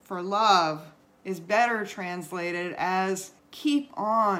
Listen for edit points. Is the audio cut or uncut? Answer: cut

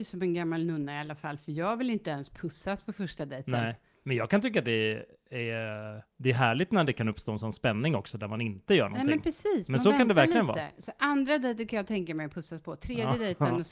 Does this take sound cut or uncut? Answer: cut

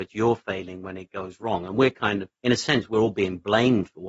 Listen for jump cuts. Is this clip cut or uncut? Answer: cut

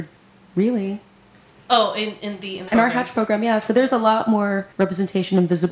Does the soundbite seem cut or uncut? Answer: cut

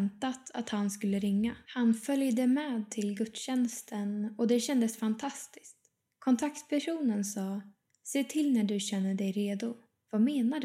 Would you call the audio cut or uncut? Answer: cut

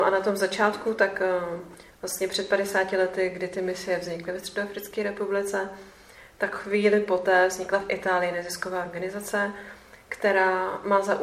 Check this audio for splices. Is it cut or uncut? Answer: uncut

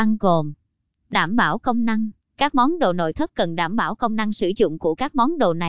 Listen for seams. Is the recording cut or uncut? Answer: uncut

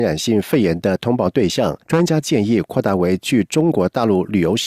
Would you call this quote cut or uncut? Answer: cut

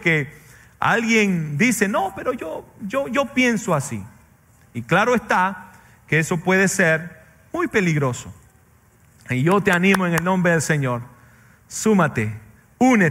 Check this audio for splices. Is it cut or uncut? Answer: uncut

